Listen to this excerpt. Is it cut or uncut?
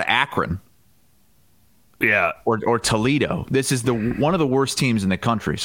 uncut